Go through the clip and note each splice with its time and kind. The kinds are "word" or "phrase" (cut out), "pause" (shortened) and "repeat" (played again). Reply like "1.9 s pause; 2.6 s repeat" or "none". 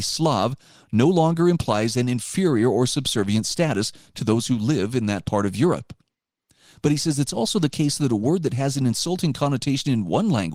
none